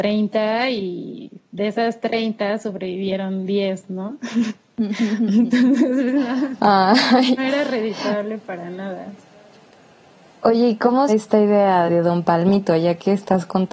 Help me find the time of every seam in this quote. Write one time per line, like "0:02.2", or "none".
0:07.4
0:11.1
0:11.9